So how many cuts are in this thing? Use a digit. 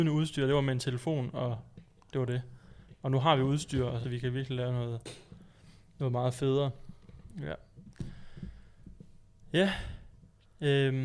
1